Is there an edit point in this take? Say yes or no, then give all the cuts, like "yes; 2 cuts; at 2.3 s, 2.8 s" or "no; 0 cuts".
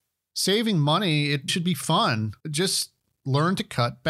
yes; 2 cuts; at 1.5 s, 2.4 s